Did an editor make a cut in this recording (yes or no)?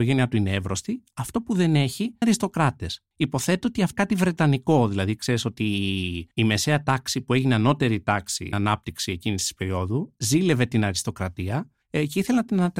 yes